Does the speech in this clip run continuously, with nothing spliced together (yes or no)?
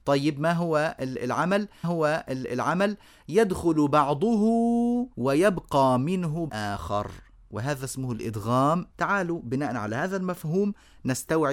no